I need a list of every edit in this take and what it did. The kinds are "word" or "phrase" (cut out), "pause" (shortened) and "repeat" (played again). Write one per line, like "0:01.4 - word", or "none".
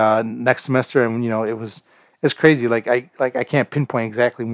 none